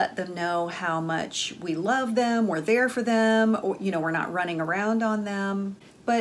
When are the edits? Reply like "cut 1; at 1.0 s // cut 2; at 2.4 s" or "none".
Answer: none